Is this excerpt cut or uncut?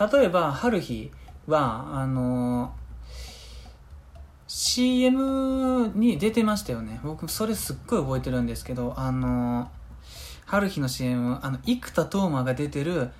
uncut